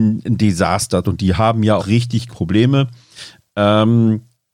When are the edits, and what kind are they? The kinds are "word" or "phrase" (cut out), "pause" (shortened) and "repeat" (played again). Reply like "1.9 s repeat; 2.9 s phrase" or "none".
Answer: 1.0 s word; 1.8 s word; 2.3 s word